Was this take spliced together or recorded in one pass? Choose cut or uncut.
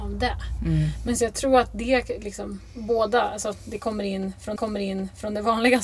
cut